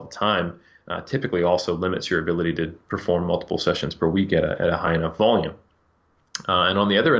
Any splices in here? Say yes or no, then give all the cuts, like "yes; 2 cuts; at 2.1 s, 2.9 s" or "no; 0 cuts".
no; 0 cuts